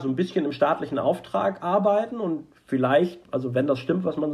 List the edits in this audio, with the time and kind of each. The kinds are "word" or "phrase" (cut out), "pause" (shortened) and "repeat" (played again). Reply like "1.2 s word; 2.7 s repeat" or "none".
none